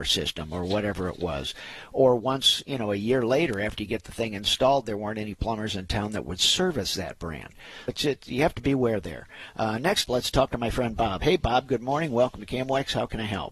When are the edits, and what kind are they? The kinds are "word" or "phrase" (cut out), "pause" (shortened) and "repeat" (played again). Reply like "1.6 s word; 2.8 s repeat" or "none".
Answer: 7.9 s word; 10.0 s word